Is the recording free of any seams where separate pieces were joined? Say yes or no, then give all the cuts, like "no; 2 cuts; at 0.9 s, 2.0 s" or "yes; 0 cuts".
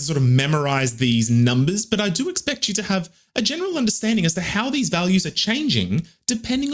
yes; 0 cuts